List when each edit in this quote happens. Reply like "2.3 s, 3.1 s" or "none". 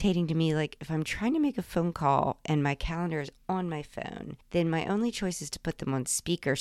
none